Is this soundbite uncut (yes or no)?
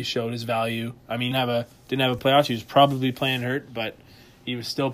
no